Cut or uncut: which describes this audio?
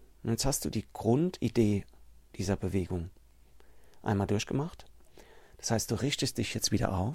uncut